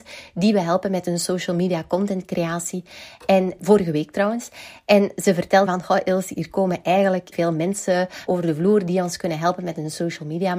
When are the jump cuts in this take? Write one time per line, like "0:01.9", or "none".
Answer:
0:03.6
0:05.7
0:07.3
0:08.3